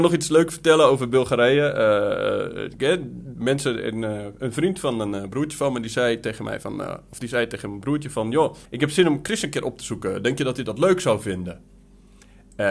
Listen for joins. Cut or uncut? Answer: cut